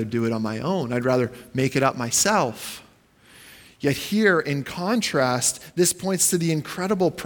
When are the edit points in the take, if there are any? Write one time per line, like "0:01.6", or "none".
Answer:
none